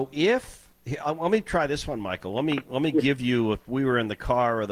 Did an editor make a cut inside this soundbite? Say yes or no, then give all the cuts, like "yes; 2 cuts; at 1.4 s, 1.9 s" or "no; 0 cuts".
no; 0 cuts